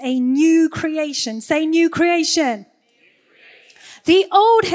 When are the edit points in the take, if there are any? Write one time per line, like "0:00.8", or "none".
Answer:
none